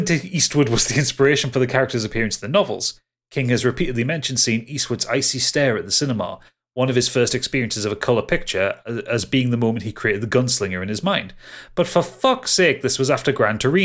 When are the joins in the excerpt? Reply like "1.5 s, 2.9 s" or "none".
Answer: none